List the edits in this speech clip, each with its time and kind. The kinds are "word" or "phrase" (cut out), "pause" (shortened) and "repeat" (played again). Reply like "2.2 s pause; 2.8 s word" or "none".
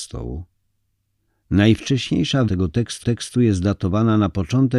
2.5 s word; 3.0 s repeat